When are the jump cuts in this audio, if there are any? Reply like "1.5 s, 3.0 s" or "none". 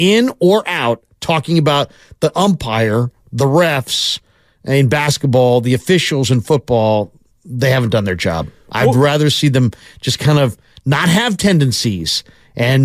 none